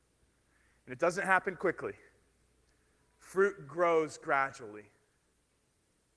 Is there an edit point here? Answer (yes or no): no